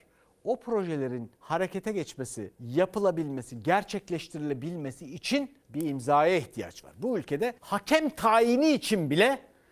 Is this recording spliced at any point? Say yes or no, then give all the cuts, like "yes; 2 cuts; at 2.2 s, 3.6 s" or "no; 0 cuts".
yes; 4 cuts; at 1.4 s, 2.5 s, 5.6 s, 7.6 s